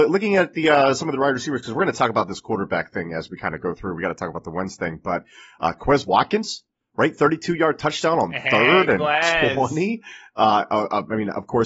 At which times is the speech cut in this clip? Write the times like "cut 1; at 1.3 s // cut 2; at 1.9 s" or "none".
none